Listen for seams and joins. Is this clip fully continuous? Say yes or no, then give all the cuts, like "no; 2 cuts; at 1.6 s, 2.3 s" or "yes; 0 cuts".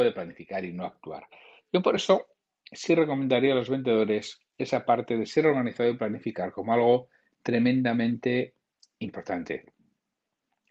yes; 0 cuts